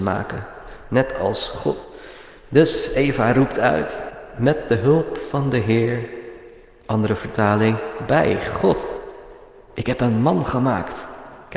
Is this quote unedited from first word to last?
no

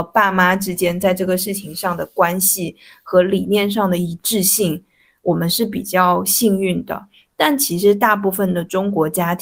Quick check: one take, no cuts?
yes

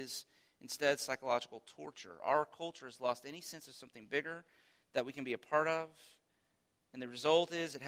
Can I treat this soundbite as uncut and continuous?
yes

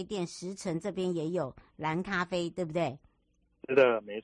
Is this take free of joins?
yes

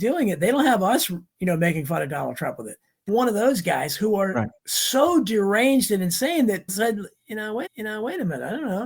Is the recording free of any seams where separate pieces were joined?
no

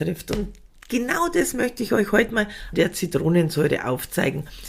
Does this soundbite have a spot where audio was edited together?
yes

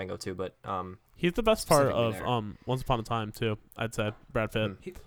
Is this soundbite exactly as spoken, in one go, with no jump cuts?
no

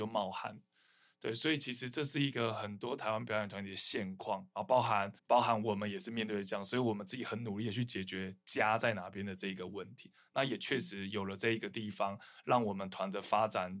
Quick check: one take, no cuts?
no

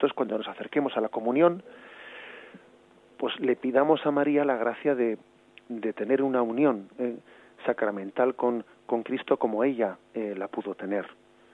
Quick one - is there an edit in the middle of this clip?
no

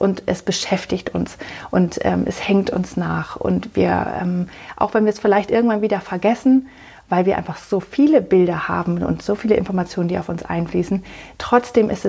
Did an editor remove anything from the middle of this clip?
no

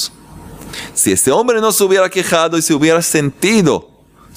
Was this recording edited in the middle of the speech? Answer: no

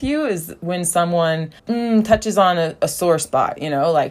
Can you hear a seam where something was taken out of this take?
yes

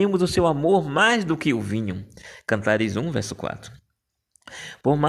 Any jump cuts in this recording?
no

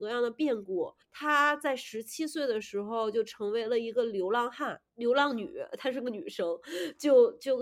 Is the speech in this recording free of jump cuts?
no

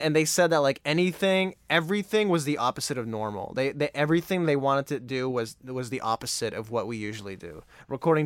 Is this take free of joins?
yes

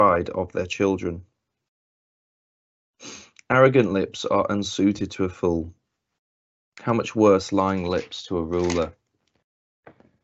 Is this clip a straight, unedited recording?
yes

